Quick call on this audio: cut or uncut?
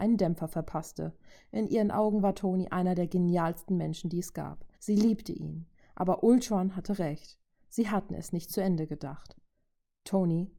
cut